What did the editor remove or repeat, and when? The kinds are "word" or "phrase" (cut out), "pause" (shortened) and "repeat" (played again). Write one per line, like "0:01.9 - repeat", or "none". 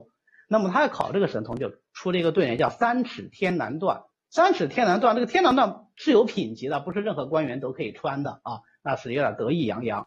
0:04.1 - pause